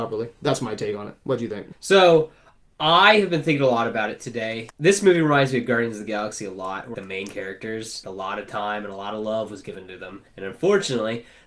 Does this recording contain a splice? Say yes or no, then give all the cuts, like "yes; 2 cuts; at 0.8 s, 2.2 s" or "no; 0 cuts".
yes; 5 cuts; at 1.7 s, 4.7 s, 6.9 s, 8.0 s, 10.3 s